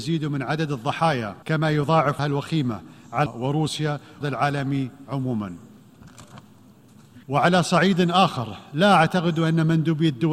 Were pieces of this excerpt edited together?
yes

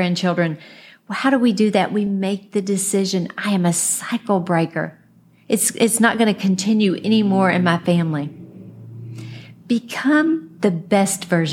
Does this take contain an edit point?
no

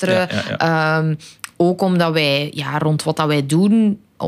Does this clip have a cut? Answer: no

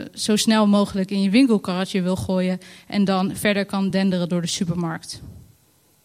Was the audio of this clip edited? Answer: no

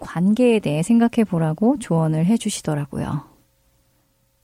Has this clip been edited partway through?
no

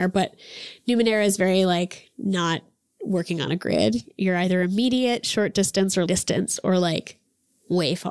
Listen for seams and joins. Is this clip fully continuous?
no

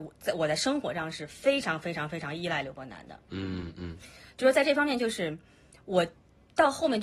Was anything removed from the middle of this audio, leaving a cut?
no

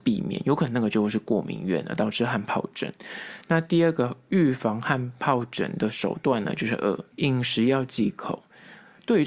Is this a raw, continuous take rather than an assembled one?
no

